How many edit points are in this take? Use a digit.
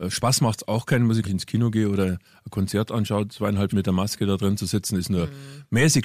2